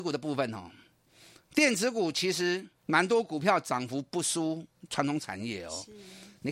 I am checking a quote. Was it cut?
yes; 1 cut; at 2.7 s

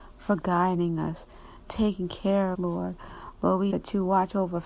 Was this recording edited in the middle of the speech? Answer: yes; 3 cuts; at 1.7 s, 2.5 s, 3.7 s

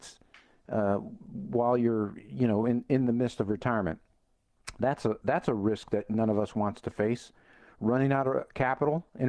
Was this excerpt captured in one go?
yes; 0 cuts

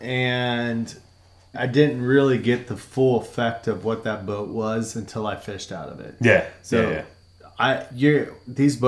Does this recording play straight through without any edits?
no; 1 cut; at 1.5 s

